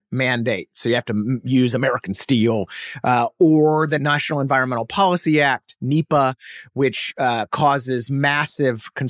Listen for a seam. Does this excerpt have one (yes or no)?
no